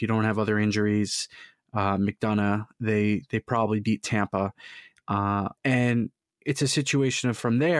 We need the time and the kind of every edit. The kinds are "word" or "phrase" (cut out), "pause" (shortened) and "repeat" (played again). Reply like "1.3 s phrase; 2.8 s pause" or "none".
5.6 s pause

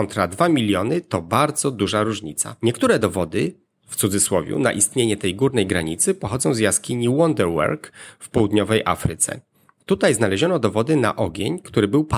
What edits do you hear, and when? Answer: none

